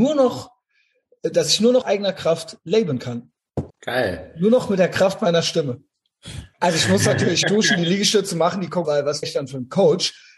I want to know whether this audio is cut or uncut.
cut